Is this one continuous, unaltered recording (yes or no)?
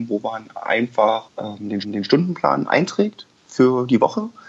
no